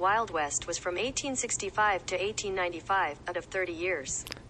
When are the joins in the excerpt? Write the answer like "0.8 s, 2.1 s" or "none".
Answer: 3.3 s